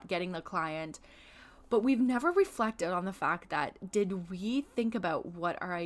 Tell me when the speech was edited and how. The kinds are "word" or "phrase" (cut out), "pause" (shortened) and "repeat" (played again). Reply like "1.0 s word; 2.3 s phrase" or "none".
none